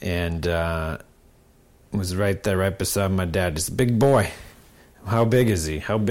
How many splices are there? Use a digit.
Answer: 1